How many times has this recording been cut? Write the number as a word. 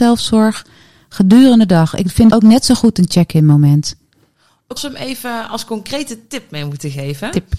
two